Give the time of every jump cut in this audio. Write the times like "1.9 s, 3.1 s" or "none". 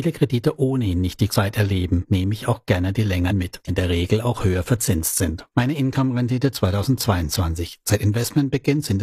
1.3 s, 3.3 s, 3.7 s